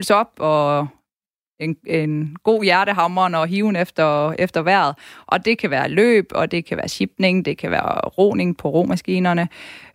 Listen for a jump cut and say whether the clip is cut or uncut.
uncut